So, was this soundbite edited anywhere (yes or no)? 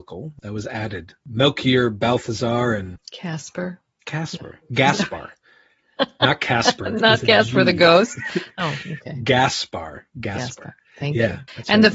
no